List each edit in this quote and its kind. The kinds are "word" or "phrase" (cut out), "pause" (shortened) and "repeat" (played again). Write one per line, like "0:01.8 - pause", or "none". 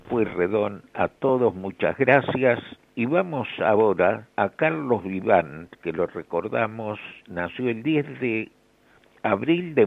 0:02.8 - pause
0:04.3 - pause
0:05.8 - pause

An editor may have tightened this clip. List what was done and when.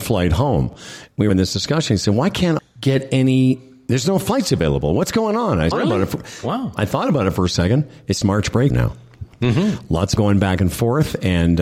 0:01.3 - word
0:02.6 - word
0:05.7 - word
0:08.2 - word
0:08.7 - word
0:10.2 - word

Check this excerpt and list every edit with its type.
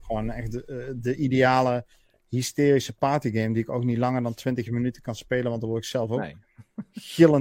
none

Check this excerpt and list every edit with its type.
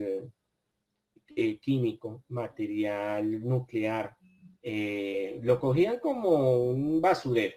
0:04.6 - pause

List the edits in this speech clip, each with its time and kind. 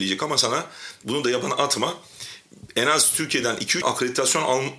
0:03.8 - phrase

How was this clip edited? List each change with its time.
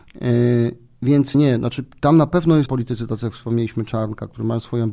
0:01.3 - word
0:02.7 - word

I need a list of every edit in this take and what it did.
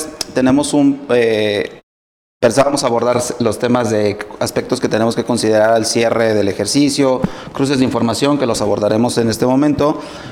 none

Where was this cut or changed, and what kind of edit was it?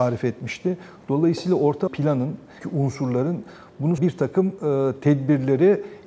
0:01.9 - word
0:02.6 - word
0:04.0 - word

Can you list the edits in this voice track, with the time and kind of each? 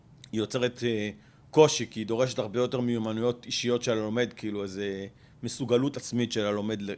none

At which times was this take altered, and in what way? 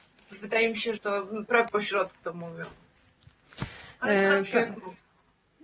0:01.0 - word
0:01.7 - word
0:02.2 - word

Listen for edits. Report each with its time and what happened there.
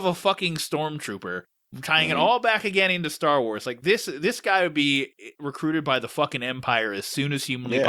none

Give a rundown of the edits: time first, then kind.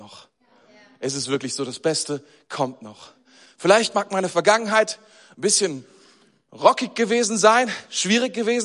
none

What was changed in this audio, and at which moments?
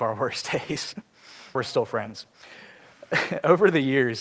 0:01.5 - phrase

